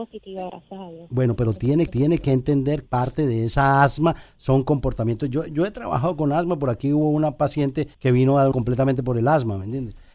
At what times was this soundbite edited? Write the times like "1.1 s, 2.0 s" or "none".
1.9 s, 2.8 s, 7.9 s, 8.5 s